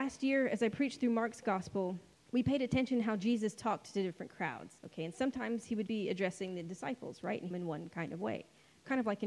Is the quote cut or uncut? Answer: cut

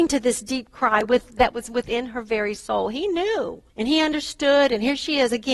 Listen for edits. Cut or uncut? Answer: cut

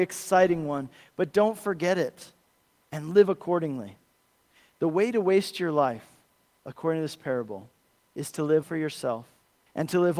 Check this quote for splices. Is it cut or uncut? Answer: cut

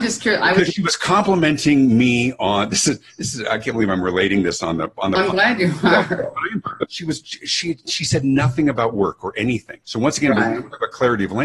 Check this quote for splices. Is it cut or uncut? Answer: cut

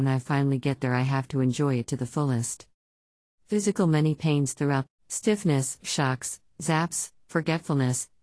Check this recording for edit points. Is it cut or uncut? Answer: cut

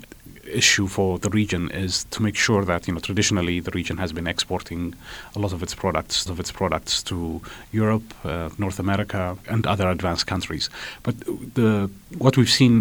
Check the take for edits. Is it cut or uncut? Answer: cut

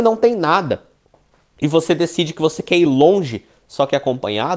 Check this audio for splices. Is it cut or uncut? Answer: uncut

